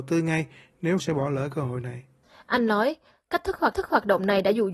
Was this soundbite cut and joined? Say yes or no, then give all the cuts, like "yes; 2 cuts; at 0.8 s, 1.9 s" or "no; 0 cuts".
yes; 3 cuts; at 1.0 s, 2.2 s, 3.7 s